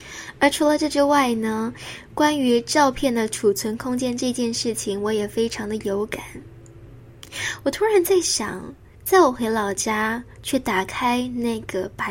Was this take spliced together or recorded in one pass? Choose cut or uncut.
cut